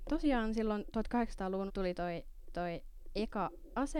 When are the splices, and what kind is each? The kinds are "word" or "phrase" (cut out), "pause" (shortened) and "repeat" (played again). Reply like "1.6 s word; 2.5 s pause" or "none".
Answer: 1.7 s word; 2.5 s repeat